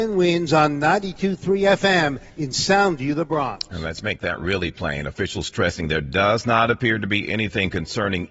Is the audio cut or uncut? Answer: cut